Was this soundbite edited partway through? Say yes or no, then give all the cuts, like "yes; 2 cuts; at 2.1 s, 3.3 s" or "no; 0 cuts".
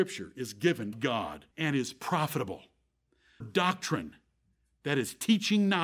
yes; 3 cuts; at 0.9 s, 1.5 s, 3.4 s